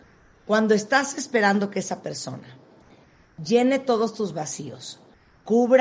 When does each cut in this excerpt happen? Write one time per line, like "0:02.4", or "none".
none